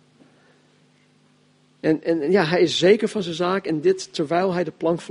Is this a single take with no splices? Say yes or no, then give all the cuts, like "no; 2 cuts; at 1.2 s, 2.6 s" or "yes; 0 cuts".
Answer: yes; 0 cuts